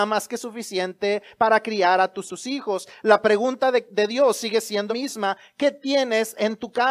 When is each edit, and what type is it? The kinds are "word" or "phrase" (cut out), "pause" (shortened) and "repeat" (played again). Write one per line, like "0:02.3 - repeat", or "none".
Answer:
0:02.3 - phrase
0:04.9 - word